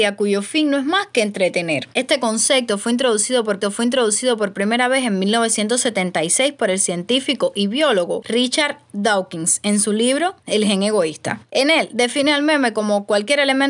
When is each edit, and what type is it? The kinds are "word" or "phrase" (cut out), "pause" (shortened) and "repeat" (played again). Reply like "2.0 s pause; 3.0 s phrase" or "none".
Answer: 1.9 s pause; 3.6 s repeat